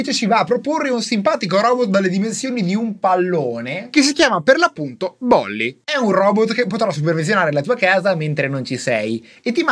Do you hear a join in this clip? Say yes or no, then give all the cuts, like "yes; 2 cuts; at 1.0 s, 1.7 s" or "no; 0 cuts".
no; 0 cuts